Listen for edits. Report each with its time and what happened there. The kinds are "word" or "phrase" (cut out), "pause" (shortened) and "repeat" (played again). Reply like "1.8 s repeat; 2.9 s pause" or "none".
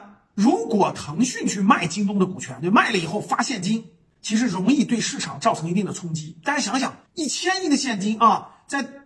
7.1 s pause